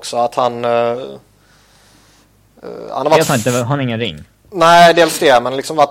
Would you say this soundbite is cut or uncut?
uncut